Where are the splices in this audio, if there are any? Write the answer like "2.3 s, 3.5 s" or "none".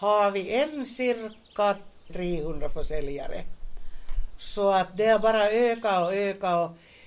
2.1 s